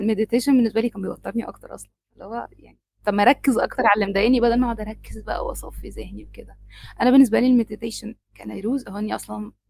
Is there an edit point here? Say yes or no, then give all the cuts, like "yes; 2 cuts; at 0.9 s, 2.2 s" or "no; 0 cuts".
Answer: yes; 1 cut; at 8.2 s